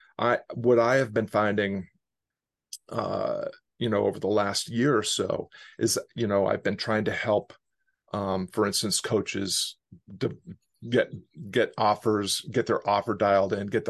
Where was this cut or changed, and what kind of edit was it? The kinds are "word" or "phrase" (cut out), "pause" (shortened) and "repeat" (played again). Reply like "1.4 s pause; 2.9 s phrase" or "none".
10.0 s pause